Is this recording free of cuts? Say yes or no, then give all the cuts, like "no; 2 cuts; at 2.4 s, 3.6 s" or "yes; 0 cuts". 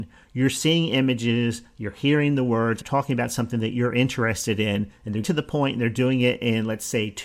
no; 2 cuts; at 2.8 s, 5.2 s